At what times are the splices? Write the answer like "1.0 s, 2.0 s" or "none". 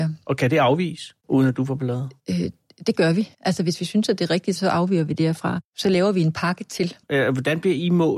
1.2 s, 2.2 s, 3.3 s, 7.0 s